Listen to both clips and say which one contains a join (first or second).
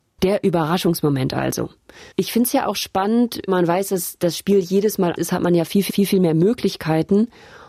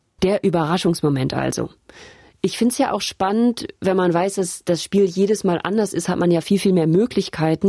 first